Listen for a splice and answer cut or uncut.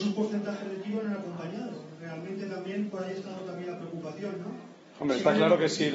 uncut